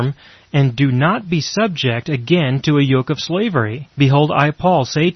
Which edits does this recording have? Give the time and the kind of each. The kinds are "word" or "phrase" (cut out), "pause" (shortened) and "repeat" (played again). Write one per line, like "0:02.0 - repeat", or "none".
0:03.9 - pause